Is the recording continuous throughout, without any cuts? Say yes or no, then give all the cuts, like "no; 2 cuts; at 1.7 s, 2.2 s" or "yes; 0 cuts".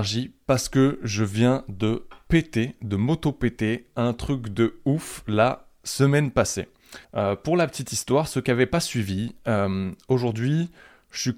no; 1 cut; at 7.0 s